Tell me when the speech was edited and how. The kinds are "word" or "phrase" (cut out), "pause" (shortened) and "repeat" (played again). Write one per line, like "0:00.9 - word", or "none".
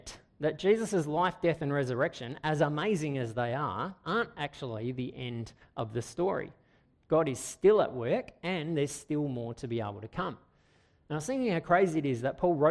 none